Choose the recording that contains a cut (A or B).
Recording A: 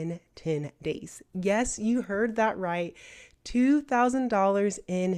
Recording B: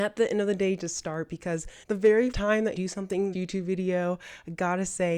B